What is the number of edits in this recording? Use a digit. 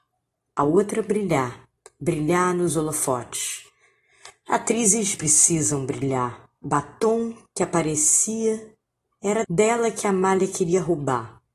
4